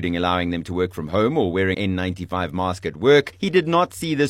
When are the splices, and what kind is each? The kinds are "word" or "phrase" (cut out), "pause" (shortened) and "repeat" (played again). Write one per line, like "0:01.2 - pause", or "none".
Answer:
0:01.7 - word